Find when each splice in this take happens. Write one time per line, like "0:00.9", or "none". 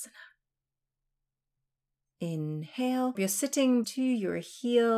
0:03.1
0:03.8